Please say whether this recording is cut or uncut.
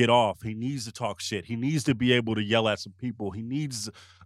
uncut